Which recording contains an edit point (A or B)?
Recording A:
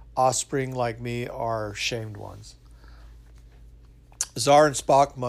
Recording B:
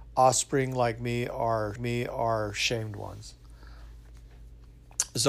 B